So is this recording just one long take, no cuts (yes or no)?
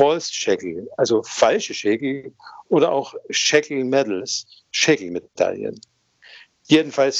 yes